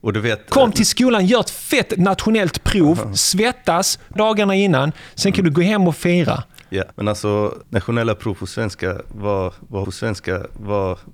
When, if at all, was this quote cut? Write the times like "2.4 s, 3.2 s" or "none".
4.2 s, 6.9 s, 7.6 s, 9.8 s

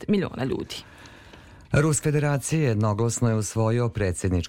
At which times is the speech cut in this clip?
2.0 s

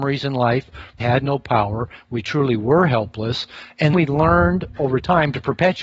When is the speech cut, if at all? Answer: 1.0 s, 3.9 s

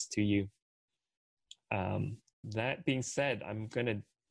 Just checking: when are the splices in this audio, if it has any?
2.4 s

